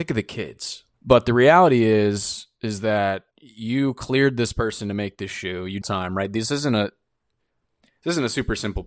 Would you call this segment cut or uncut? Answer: cut